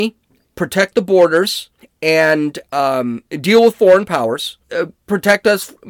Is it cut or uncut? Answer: cut